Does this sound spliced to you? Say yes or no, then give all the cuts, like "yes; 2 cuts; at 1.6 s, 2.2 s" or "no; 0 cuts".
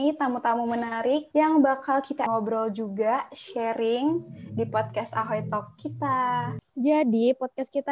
yes; 1 cut; at 2.3 s